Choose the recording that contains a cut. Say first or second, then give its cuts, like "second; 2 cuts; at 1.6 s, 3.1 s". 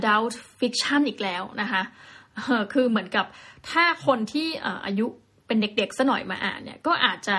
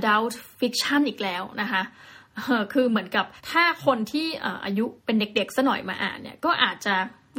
second; 2 cuts; at 3.4 s, 5.0 s